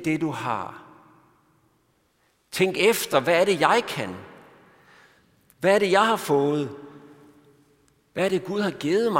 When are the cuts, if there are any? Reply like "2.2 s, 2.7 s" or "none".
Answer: none